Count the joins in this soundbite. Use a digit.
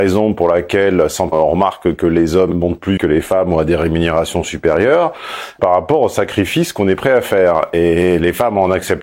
4